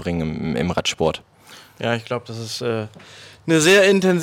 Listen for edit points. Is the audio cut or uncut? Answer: uncut